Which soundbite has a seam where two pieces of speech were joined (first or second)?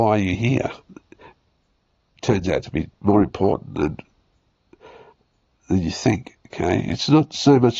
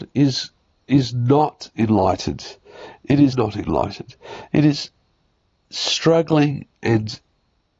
second